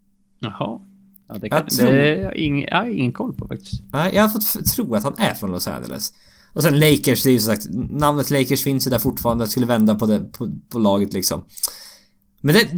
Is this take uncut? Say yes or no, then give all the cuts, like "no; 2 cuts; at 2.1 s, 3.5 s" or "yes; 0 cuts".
yes; 0 cuts